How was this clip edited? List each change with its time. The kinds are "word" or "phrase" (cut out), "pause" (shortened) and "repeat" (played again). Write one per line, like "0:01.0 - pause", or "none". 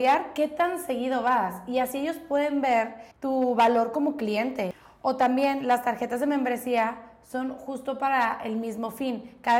0:03.1 - pause